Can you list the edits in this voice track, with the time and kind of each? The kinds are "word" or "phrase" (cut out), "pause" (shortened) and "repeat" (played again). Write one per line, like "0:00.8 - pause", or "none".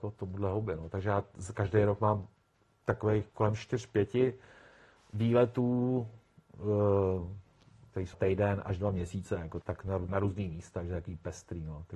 0:03.3 - pause
0:08.1 - word
0:09.6 - word
0:10.1 - word